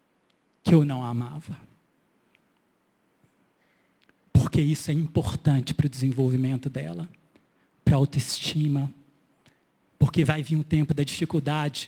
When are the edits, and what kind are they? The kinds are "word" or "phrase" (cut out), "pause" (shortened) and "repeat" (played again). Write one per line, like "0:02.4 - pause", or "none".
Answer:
none

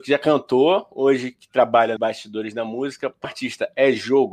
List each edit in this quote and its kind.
0:02.0 - word
0:03.2 - word

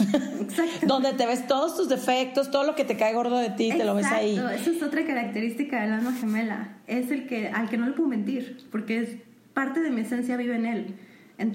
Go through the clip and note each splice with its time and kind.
none

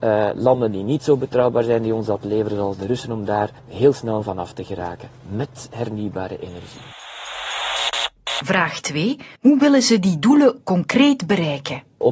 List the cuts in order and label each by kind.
0:03.6 - pause
0:09.3 - pause

